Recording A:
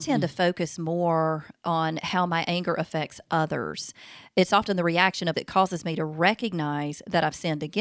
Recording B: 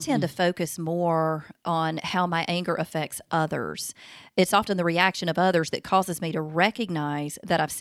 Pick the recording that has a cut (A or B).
A